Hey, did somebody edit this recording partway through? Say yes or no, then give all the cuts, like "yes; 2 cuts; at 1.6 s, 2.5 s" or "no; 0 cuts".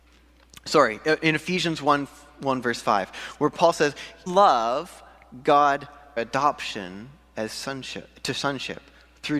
yes; 2 cuts; at 4.3 s, 6.2 s